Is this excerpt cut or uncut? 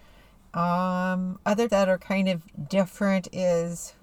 cut